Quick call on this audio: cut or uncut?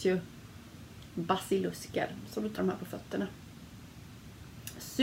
cut